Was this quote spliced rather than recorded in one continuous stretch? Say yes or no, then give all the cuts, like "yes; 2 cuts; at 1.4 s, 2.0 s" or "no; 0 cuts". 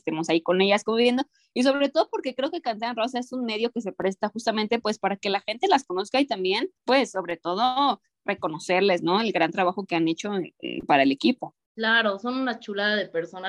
no; 0 cuts